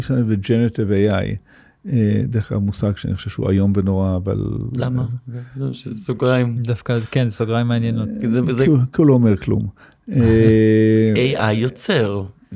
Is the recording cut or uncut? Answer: uncut